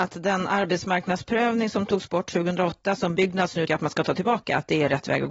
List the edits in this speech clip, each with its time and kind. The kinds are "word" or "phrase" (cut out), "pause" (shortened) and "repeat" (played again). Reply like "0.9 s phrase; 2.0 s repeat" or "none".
3.7 s word